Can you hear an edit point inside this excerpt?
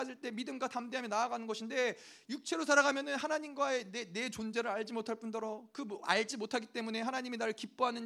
no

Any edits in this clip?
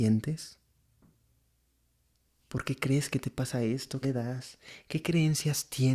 yes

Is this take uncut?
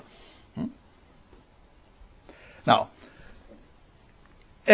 yes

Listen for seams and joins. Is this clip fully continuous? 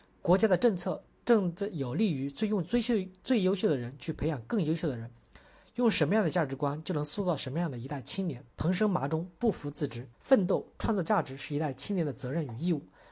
no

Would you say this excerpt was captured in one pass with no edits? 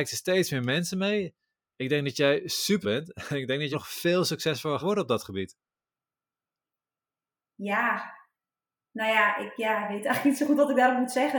no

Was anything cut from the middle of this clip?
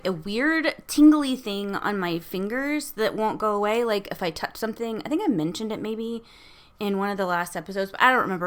no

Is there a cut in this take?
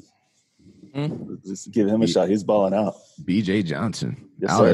no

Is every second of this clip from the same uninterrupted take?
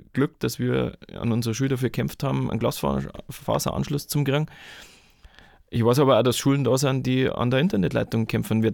yes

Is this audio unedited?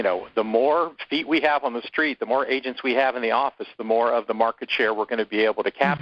yes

